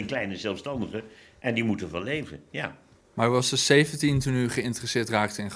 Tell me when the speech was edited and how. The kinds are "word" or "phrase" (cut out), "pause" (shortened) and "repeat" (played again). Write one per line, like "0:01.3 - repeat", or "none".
none